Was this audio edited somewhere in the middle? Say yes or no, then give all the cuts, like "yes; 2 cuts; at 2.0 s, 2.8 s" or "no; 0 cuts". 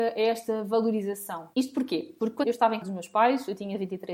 yes; 3 cuts; at 1.5 s, 2.4 s, 2.8 s